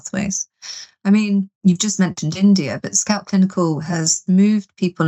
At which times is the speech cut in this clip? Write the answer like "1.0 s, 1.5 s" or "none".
1.6 s